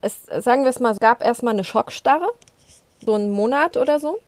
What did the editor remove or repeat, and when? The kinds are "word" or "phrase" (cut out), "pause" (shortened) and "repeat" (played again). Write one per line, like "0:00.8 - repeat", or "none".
0:01.0 - word
0:03.1 - word